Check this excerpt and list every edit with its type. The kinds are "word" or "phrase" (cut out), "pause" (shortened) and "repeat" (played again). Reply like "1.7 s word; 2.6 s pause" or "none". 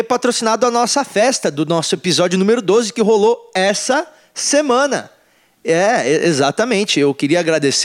none